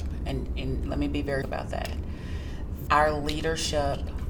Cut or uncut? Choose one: cut